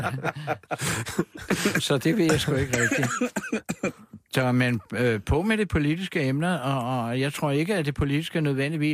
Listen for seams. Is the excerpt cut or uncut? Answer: uncut